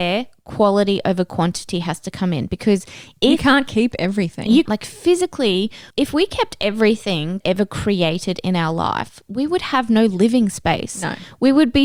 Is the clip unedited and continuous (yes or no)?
no